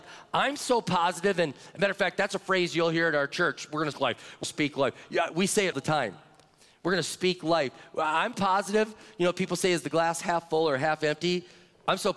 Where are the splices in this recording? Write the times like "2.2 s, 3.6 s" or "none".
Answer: 3.9 s, 4.4 s, 5.7 s, 8.3 s